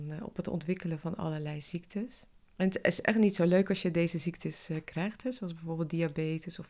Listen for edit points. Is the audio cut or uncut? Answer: uncut